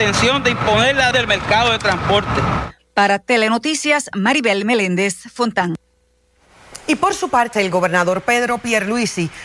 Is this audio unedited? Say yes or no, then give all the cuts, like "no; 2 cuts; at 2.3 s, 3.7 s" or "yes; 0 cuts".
no; 2 cuts; at 1.1 s, 7.5 s